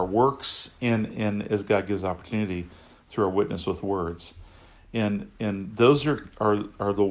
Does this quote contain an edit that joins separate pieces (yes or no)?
no